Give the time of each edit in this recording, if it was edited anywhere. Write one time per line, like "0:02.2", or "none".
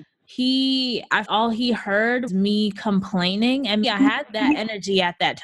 0:01.2
0:02.3
0:03.8